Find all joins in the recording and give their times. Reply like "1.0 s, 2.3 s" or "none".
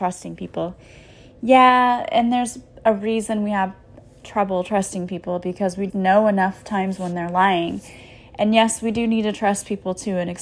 5.9 s